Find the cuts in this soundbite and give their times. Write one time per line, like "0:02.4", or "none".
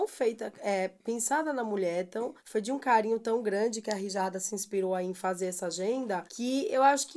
0:02.4
0:06.3